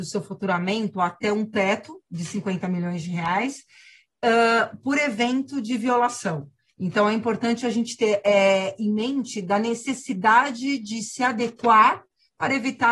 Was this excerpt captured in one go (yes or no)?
yes